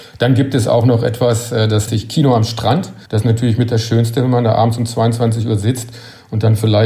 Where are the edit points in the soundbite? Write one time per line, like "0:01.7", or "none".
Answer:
0:01.9
0:03.1